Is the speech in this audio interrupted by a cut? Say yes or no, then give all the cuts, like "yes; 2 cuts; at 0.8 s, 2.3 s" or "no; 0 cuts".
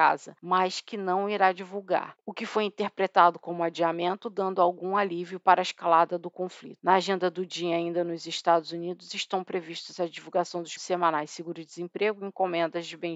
yes; 1 cut; at 10.8 s